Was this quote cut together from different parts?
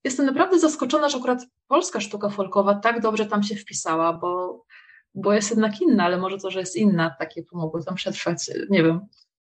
no; 0 cuts

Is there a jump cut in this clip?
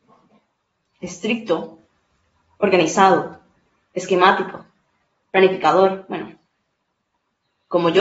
no; 0 cuts

